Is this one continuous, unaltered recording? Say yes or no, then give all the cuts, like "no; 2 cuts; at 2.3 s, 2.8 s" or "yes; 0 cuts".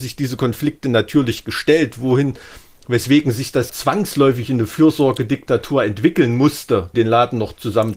no; 2 cuts; at 3.7 s, 6.9 s